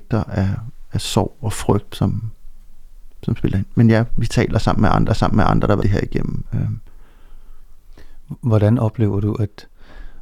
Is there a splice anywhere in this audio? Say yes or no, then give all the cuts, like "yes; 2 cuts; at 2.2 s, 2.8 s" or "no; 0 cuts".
yes; 4 cuts; at 1.9 s, 4.1 s, 5.1 s, 5.8 s